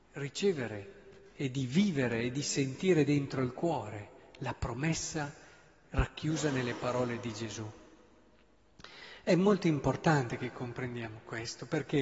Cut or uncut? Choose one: uncut